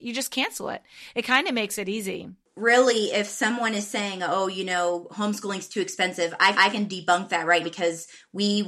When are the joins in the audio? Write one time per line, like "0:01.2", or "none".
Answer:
0:06.5
0:07.6

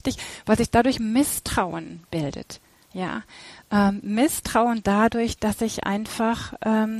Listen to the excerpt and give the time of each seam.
none

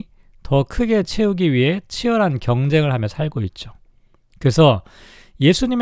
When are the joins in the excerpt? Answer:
none

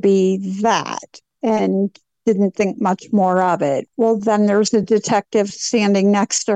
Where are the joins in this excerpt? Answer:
none

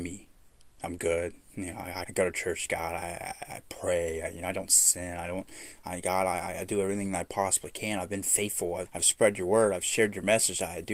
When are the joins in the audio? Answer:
0:02.0
0:08.9

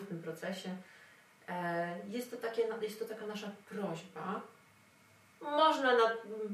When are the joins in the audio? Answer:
none

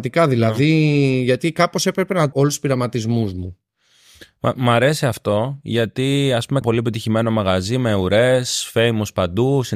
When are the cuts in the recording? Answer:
0:02.3
0:06.6

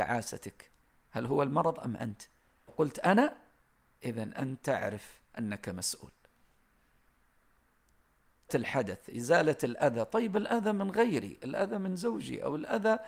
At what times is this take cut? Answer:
0:02.7
0:08.5

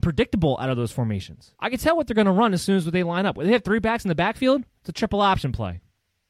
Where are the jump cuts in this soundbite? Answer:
0:01.5

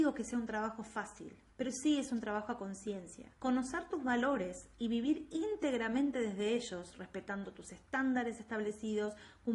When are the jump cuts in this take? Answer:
0:01.5
0:03.3

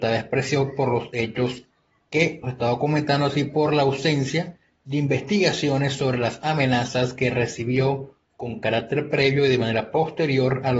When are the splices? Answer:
0:02.4

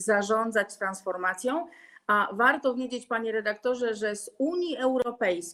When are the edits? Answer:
none

